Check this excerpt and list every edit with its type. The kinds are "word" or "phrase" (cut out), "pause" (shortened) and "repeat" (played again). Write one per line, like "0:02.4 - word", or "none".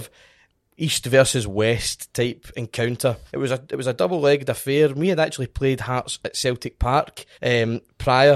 0:03.3 - pause
0:07.3 - pause